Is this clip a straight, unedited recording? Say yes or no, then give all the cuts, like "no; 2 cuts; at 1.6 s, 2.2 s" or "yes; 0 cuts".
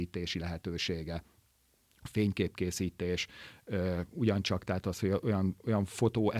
yes; 0 cuts